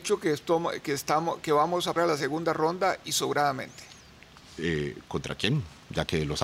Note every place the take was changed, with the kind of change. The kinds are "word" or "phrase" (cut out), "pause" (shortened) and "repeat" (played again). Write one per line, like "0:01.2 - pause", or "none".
0:02.0 - word